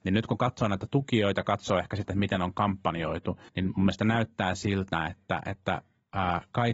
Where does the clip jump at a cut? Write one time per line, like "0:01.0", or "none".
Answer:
0:03.5